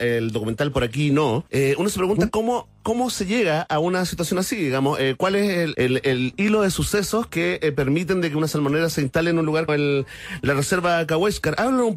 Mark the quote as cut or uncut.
cut